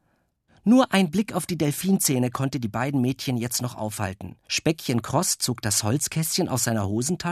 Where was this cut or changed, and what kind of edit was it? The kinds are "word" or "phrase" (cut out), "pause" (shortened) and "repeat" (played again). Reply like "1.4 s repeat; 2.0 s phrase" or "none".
4.4 s pause